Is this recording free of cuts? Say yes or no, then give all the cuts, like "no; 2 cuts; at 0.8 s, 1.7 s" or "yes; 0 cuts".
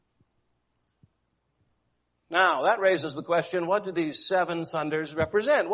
yes; 0 cuts